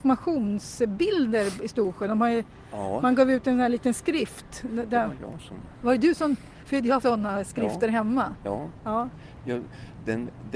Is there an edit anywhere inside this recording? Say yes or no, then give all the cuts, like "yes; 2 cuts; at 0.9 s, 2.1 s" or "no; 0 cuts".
yes; 1 cut; at 7.0 s